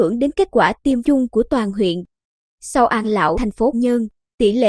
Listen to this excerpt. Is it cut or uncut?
cut